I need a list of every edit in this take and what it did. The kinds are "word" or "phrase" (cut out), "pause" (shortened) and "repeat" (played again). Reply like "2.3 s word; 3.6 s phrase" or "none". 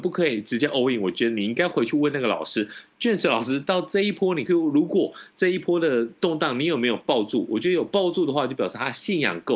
4.5 s word